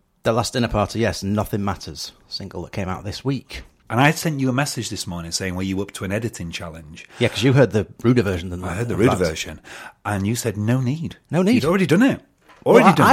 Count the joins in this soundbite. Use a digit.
0